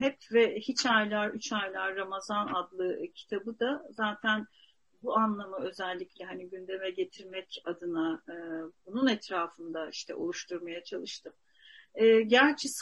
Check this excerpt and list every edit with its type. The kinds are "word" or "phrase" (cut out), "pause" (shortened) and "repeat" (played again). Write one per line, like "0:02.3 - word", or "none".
none